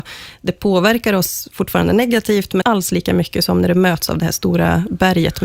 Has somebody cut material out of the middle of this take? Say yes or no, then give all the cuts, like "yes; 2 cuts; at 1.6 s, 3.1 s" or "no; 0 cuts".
yes; 1 cut; at 2.6 s